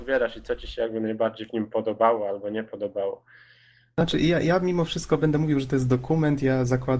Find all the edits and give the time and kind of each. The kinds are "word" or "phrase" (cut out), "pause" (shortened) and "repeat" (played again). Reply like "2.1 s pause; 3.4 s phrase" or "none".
none